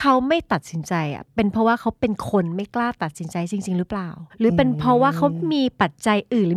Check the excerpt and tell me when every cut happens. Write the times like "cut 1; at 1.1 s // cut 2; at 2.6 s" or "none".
cut 1; at 4.3 s